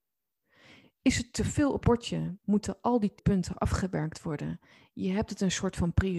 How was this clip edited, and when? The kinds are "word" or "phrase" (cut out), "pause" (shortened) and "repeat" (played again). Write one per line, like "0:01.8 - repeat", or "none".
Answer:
0:01.8 - word
0:03.2 - word